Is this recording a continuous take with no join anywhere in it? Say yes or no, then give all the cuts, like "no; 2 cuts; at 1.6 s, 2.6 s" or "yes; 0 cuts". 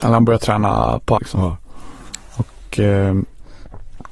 no; 1 cut; at 1.2 s